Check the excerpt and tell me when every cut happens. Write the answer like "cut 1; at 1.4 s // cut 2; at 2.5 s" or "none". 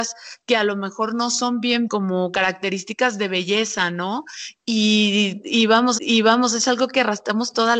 cut 1; at 1.9 s // cut 2; at 6.0 s